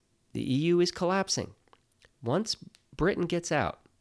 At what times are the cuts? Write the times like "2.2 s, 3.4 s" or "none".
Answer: none